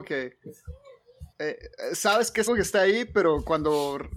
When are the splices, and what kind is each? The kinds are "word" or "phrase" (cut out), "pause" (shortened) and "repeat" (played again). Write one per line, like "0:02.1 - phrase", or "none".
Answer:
0:01.3 - pause
0:02.5 - word